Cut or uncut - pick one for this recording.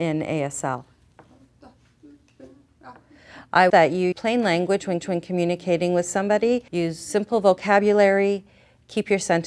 cut